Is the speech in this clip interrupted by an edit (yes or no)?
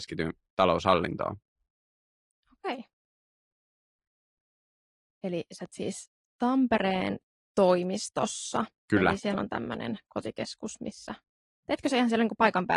yes